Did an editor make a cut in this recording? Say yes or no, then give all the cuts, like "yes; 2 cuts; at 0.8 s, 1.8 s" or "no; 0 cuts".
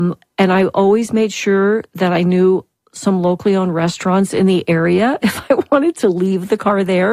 no; 0 cuts